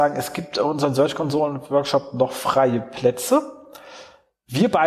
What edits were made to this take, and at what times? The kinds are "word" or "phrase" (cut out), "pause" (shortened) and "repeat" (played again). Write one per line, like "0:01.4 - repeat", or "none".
none

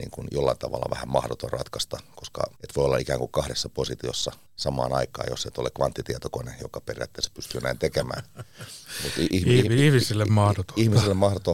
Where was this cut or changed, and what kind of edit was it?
0:02.6 - pause
0:04.5 - pause

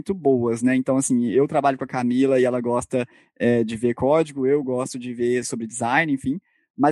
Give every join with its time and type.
none

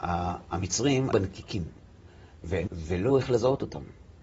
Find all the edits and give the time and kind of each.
0:01.1 - word
0:02.7 - word
0:03.1 - word

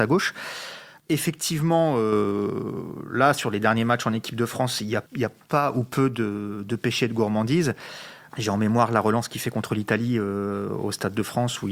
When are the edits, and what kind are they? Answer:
0:05.1 - pause

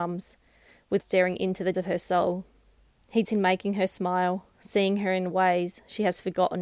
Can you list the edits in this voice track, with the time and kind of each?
0:01.0 - phrase
0:01.7 - word
0:03.2 - word
0:04.5 - pause

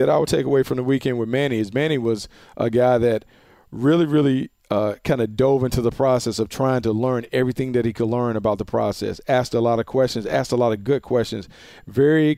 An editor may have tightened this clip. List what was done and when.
none

